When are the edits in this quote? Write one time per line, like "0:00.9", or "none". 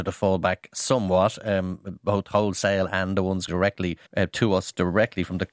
0:03.5
0:04.1

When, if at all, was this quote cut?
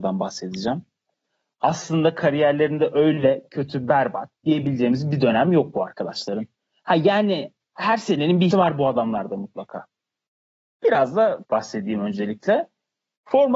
0:08.5
0:11.4

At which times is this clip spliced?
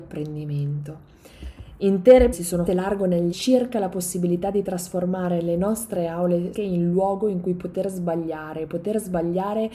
0:02.3
0:02.7
0:03.3
0:06.5

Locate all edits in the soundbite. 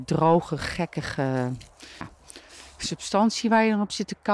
0:02.0

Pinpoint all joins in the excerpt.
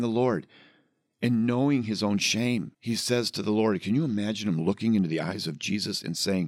0:02.7

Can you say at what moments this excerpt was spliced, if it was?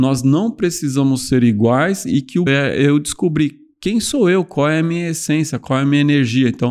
0:02.5

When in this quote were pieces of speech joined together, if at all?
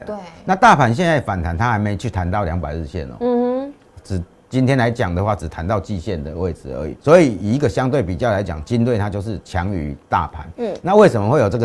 0:04.4
0:07.0

